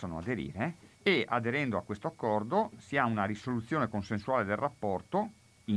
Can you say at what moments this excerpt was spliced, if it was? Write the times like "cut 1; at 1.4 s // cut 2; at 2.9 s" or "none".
cut 1; at 0.9 s